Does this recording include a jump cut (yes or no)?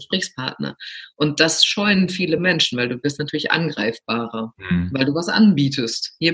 no